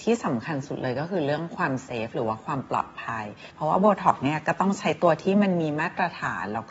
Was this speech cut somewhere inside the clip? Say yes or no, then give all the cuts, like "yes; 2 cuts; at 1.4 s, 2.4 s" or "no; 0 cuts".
yes; 1 cut; at 3.5 s